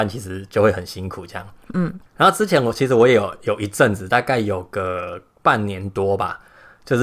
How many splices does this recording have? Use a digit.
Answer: 1